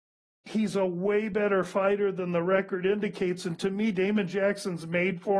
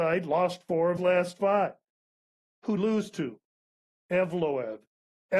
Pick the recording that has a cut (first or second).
second